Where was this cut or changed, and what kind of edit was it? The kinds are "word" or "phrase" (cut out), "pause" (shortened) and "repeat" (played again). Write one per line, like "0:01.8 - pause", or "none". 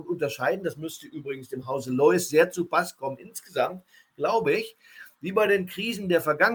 none

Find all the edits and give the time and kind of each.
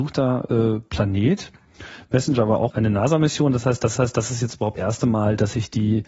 0:02.7 - word
0:04.0 - repeat
0:04.8 - word

